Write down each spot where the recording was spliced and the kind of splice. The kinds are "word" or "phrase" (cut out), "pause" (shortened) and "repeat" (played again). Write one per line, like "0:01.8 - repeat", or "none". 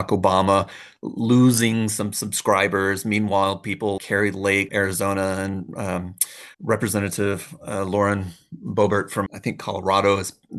0:04.0 - word
0:04.7 - word
0:06.5 - pause
0:09.3 - word

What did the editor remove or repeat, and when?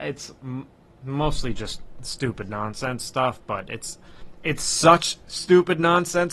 none

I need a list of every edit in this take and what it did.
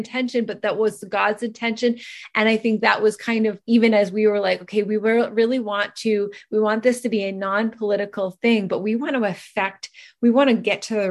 0:03.6 - pause

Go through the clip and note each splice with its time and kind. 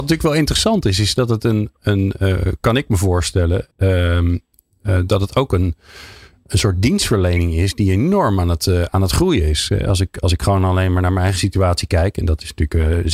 0:03.7 - pause

